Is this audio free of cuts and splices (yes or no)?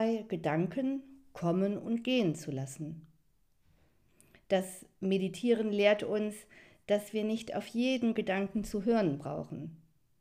yes